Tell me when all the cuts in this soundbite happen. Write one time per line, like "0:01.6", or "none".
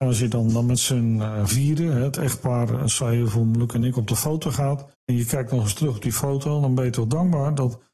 0:04.9